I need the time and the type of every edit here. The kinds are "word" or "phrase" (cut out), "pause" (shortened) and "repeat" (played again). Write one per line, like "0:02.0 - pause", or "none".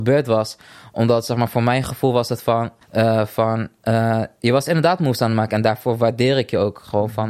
0:02.8 - pause